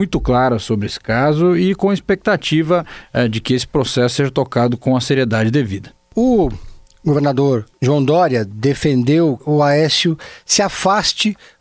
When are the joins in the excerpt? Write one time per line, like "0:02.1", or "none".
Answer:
0:07.7
0:09.4